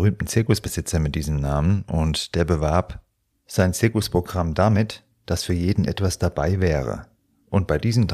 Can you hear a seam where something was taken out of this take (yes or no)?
no